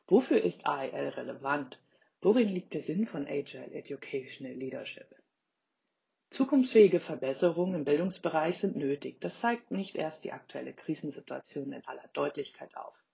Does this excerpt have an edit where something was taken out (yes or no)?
no